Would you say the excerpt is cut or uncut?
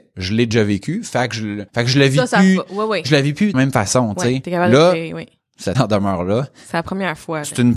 cut